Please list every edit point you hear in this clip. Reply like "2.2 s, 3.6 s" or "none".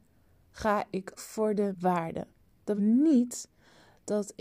1.2 s, 1.7 s, 2.8 s